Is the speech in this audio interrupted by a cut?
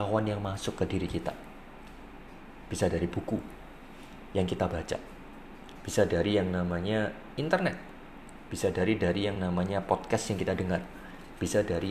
no; 0 cuts

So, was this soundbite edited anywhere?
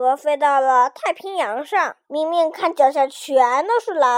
yes; 1 cut; at 2.0 s

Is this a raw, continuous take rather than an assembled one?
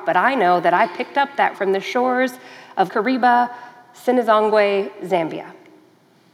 no; 2 cuts; at 1.5 s, 2.9 s

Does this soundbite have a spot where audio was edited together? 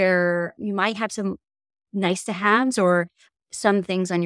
no; 0 cuts

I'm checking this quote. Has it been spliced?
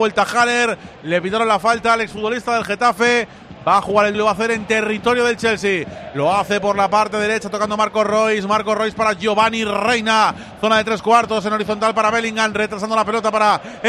yes; 1 cut; at 4.1 s

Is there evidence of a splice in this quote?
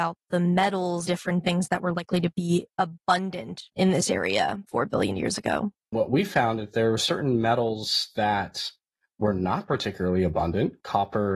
yes; 2 cuts; at 1.0 s, 3.7 s

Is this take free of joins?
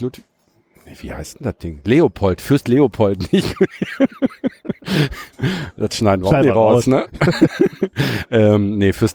yes; 0 cuts

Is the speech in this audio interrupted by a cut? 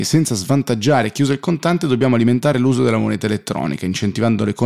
no; 0 cuts

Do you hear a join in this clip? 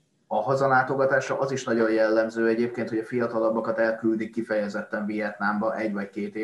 no; 0 cuts

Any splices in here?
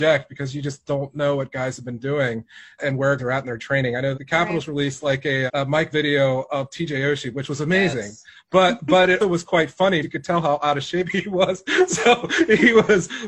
yes; 7 cuts; at 2.8 s, 3.2 s, 4.1 s, 5.5 s, 5.9 s, 9.2 s, 10.0 s

